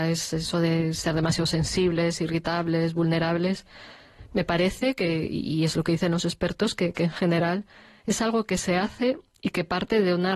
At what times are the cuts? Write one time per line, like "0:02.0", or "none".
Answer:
none

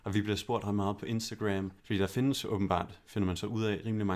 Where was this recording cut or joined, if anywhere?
0:01.8

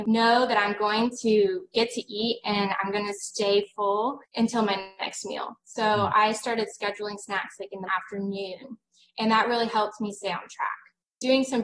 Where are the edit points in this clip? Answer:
0:04.2
0:07.9

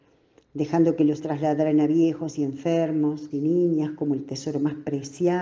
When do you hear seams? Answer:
0:01.2
0:03.3

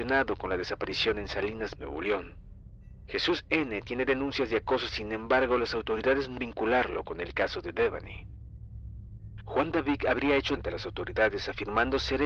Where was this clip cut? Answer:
0:01.8
0:04.9
0:06.4
0:10.6

